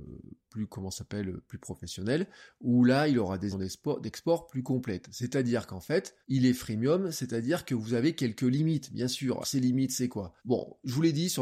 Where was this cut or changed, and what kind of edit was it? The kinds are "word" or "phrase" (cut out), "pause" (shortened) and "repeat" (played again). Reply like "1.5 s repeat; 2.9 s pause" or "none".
3.5 s word; 6.2 s pause; 9.4 s word; 10.4 s pause